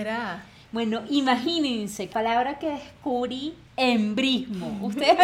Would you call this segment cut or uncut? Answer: cut